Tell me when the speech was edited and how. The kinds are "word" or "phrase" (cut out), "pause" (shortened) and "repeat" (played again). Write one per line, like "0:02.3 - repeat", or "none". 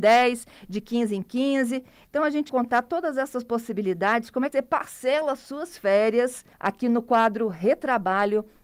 0:02.5 - word
0:04.5 - word
0:06.5 - pause